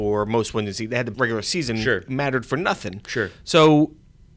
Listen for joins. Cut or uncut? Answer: cut